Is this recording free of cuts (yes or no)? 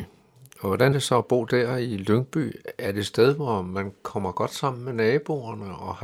no